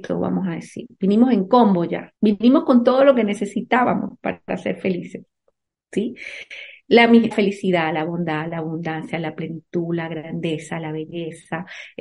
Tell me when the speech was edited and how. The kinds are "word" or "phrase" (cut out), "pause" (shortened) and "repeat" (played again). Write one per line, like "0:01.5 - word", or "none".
0:02.2 - pause
0:07.3 - word